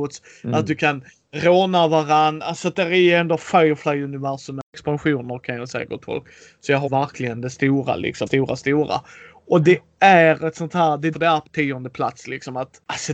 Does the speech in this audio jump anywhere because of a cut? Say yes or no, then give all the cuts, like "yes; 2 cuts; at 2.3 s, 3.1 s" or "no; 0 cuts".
yes; 4 cuts; at 6.9 s, 8.3 s, 11.1 s, 11.5 s